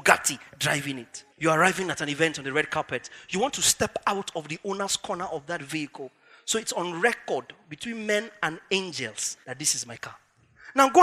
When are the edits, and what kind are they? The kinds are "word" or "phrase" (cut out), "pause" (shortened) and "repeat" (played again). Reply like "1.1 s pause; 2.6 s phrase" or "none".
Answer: 1.3 s pause; 9.4 s pause